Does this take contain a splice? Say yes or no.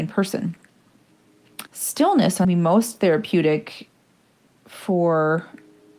yes